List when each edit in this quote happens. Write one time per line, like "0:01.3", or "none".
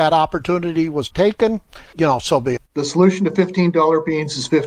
0:01.1
0:01.9
0:02.6